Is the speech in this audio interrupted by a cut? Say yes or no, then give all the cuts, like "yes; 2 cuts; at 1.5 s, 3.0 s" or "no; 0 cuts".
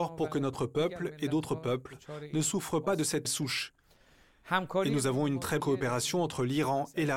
yes; 2 cuts; at 3.2 s, 5.6 s